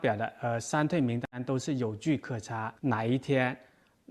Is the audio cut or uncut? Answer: cut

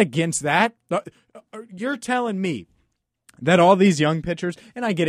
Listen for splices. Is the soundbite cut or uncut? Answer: uncut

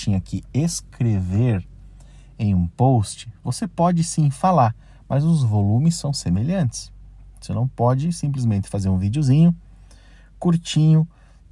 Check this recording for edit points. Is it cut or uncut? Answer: uncut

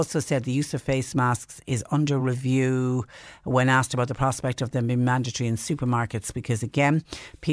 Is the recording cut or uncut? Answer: uncut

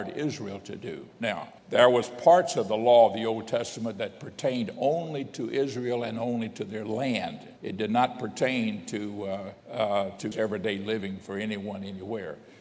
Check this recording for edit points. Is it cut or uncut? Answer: cut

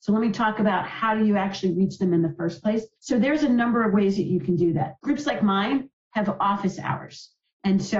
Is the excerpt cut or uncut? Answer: cut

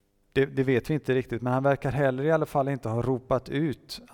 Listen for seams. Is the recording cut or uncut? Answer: uncut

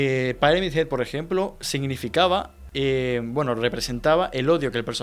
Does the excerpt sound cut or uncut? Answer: uncut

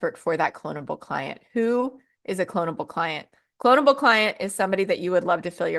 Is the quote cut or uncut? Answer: uncut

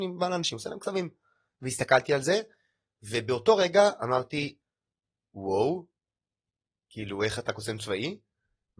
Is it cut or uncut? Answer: uncut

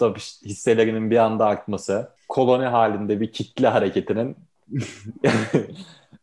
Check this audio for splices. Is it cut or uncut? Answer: cut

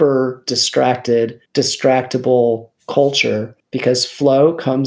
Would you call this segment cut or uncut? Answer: cut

